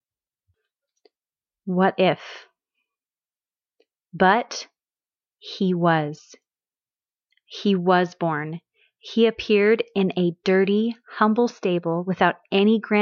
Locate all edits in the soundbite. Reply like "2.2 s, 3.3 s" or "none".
none

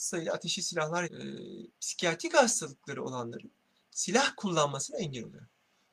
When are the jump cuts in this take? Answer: 1.0 s

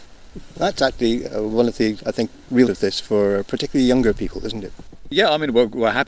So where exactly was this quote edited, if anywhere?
2.7 s

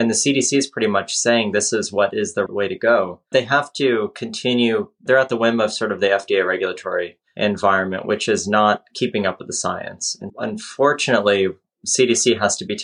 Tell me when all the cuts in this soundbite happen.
2.5 s, 3.3 s, 5.1 s, 10.3 s

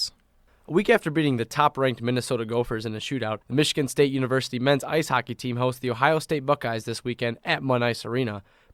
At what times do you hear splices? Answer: 3.4 s

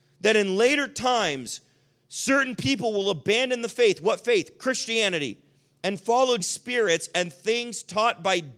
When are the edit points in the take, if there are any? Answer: 6.4 s

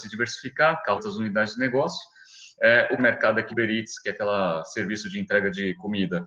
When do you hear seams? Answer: 1.0 s, 3.0 s, 3.5 s

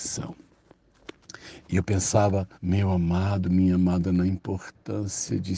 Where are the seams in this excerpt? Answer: 2.5 s

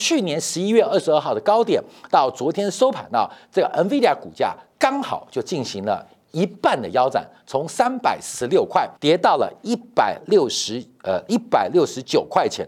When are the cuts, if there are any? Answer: 9.0 s

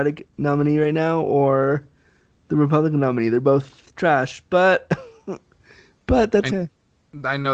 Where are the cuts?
6.5 s

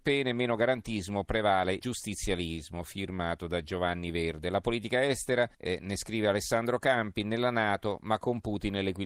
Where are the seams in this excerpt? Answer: 1.8 s, 5.5 s

